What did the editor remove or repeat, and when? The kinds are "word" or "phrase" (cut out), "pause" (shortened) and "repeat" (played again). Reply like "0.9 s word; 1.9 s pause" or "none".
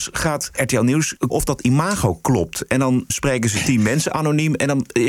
1.3 s word; 3.1 s word